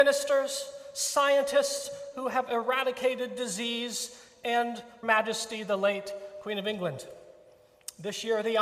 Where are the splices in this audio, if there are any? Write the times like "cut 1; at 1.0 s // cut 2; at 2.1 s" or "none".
cut 1; at 5.0 s